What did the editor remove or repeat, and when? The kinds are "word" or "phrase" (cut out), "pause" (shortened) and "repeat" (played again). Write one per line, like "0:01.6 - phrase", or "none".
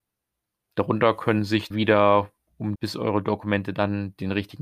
0:01.7 - word
0:02.8 - phrase

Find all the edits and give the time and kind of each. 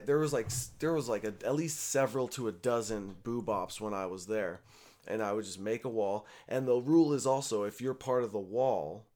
none

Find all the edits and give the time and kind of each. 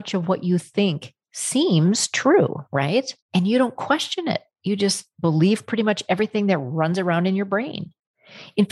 0:03.2 - pause

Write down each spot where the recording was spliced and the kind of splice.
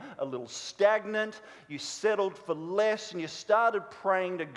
none

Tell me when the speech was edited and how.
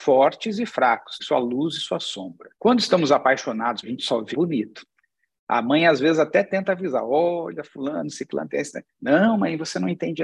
0:01.2 - word
0:02.5 - pause
0:03.8 - phrase
0:04.3 - phrase

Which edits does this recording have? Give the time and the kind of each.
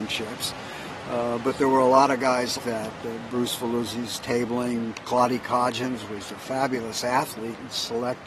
0:02.6 - word
0:06.3 - word

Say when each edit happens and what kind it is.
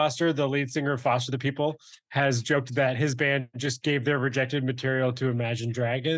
none

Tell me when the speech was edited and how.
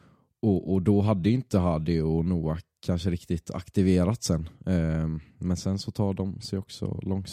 none

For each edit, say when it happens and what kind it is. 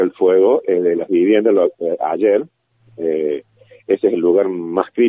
none

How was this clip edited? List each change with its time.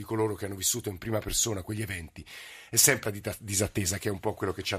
0:03.0 - word

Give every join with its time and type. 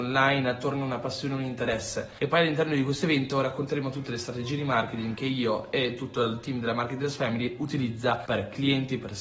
none

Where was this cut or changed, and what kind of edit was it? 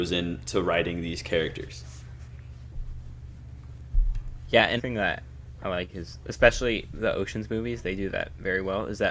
0:04.8 - word
0:05.6 - word

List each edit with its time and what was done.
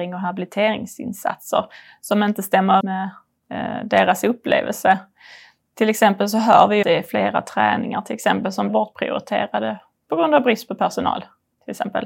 0:02.8 - word
0:06.8 - word
0:08.7 - word

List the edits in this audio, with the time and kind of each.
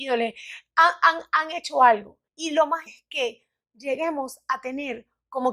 0:02.3 - pause
0:02.9 - word

